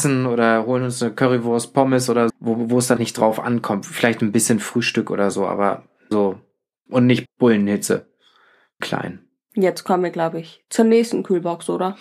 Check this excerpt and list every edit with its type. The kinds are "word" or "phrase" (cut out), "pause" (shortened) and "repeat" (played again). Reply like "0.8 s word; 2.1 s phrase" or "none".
2.3 s word; 3.0 s word; 6.1 s word; 6.9 s word; 7.3 s word; 8.8 s word